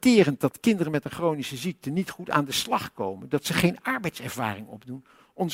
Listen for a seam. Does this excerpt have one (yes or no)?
no